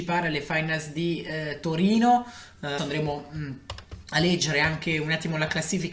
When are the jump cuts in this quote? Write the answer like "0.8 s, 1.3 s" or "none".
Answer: 2.8 s